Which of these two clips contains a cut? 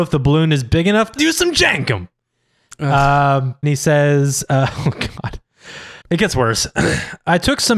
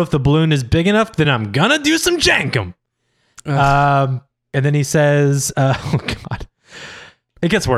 first; 3 cuts; at 1.2 s, 3.6 s, 6.0 s

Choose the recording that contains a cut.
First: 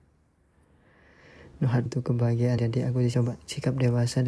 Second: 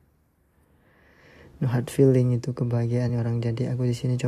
first; 3 cuts; at 1.9 s, 2.6 s, 3.1 s

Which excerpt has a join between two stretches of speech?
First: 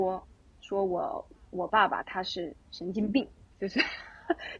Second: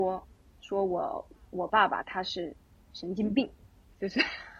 first; 2 cuts; at 2.6 s, 3.5 s

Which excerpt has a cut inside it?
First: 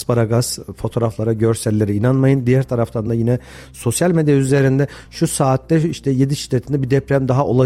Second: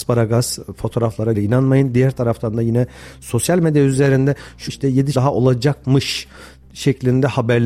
second; 3 cuts; at 1.3 s, 4.7 s, 5.1 s

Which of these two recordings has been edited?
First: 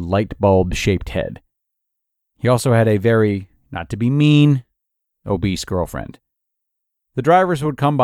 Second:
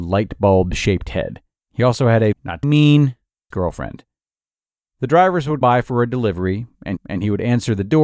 second; 6 cuts; at 1.6 s, 2.3 s, 2.6 s, 3.5 s, 5.6 s, 7.0 s

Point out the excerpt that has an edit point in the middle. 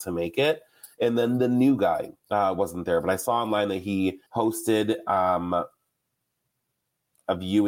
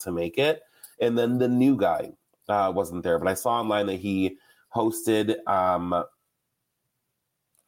first; 2 cuts; at 2.2 s, 4.3 s

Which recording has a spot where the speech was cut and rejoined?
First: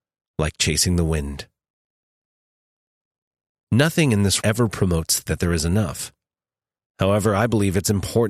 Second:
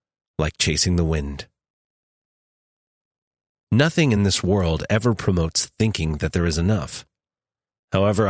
first; 2 cuts; at 4.4 s, 5.3 s

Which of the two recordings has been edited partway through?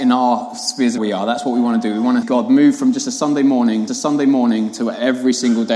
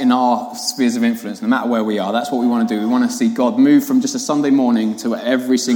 first; 3 cuts; at 1.0 s, 2.2 s, 3.9 s

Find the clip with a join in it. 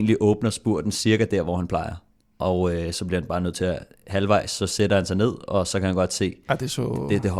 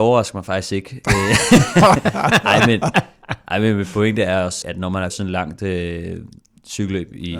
second; 2 cuts; at 4.6 s, 5.1 s

